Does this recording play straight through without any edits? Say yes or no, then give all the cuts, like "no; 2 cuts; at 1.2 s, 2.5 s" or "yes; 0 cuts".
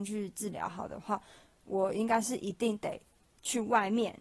yes; 0 cuts